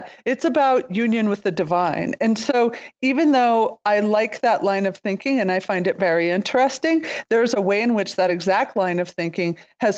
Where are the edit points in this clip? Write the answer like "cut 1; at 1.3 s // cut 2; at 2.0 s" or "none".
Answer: none